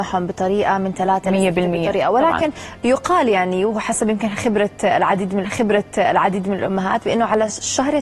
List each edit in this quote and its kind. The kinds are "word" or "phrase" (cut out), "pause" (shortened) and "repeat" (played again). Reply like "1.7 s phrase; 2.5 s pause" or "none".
5.4 s repeat